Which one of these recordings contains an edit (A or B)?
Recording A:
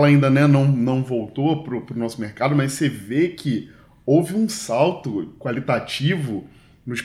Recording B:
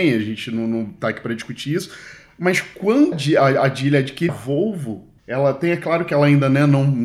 B